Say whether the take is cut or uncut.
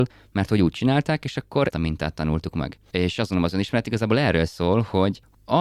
cut